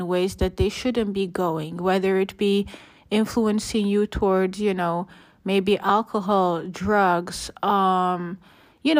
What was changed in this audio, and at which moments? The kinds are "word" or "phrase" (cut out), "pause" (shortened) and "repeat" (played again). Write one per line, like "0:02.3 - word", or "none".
none